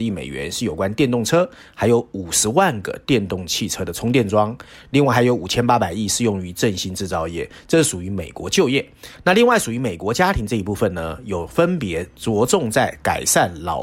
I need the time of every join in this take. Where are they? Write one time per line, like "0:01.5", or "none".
none